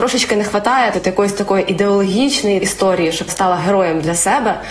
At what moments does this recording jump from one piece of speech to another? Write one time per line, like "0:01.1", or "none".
0:00.9
0:02.6
0:03.3